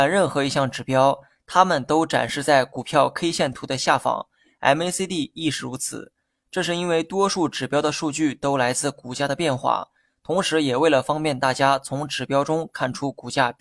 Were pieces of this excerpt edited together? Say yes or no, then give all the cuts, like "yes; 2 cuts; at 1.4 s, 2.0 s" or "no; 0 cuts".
no; 0 cuts